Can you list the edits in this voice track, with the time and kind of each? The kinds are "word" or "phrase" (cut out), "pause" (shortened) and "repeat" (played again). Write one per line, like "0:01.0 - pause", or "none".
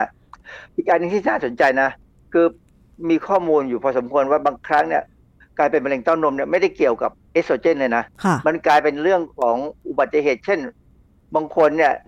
none